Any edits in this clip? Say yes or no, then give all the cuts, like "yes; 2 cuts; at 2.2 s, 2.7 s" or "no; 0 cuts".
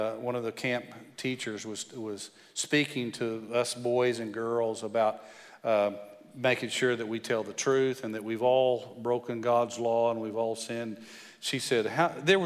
no; 0 cuts